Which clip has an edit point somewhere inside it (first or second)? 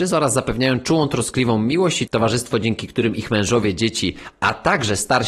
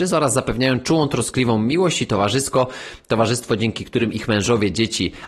first